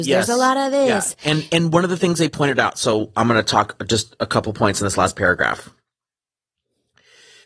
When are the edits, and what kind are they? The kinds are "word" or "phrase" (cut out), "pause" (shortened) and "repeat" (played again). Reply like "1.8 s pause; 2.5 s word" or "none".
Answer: none